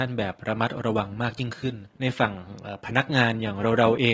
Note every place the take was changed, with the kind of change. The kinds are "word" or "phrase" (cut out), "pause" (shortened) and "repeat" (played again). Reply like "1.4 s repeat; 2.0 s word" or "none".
1.9 s pause

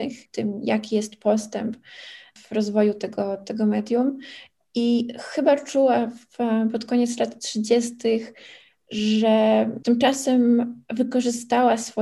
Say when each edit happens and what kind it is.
none

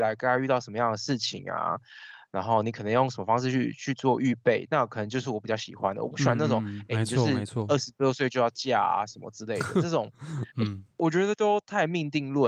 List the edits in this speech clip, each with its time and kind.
10.5 s pause

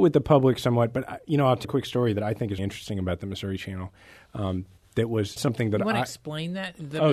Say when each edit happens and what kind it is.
1.6 s word; 2.6 s word; 5.4 s word

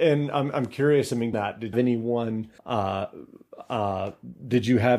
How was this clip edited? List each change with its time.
1.3 s word; 1.7 s phrase; 2.6 s pause

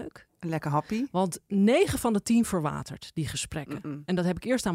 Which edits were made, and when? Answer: none

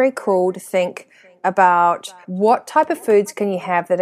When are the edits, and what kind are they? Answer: 2.2 s pause

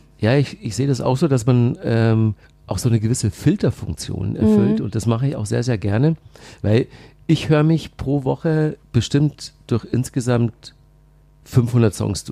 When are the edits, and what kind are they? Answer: 2.4 s pause; 8.8 s pause

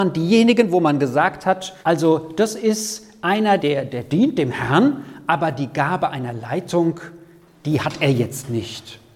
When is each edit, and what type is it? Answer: 1.8 s pause; 3.6 s word

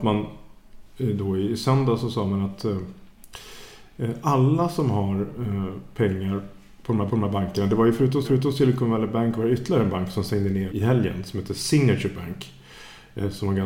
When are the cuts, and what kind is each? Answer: 7.1 s repeat; 8.2 s repeat; 10.7 s word

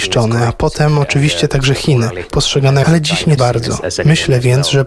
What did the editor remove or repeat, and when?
2.3 s phrase; 2.8 s phrase; 3.4 s word

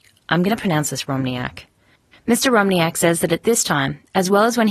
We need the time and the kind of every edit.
none

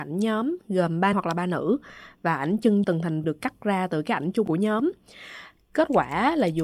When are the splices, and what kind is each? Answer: 1.1 s word; 2.8 s word; 3.2 s word

